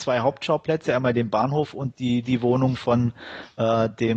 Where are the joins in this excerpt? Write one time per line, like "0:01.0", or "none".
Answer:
none